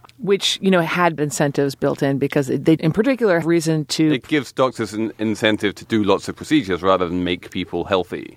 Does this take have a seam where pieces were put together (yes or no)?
yes